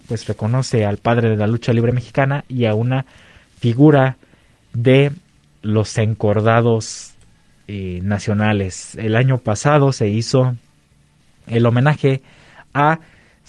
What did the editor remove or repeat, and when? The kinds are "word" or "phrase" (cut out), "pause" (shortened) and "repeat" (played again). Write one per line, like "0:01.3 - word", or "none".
none